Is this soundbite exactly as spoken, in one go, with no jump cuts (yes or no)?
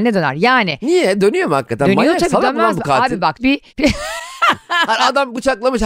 no